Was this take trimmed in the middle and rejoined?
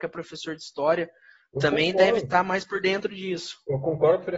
no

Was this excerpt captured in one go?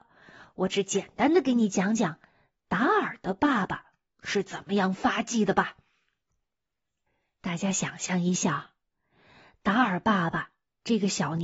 yes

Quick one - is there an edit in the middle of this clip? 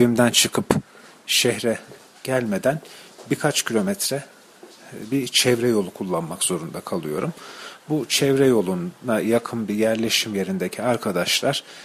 no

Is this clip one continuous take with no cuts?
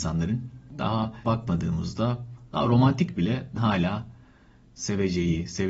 no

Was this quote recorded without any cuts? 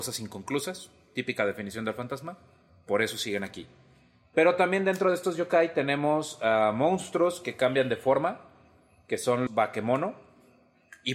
no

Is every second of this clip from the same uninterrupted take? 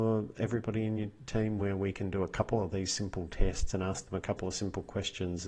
yes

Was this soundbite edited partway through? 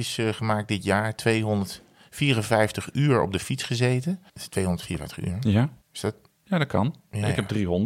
yes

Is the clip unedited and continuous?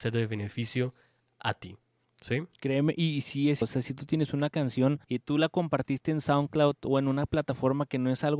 no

